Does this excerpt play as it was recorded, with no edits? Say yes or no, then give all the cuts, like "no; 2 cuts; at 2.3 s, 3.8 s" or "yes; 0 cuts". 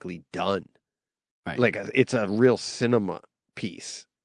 yes; 0 cuts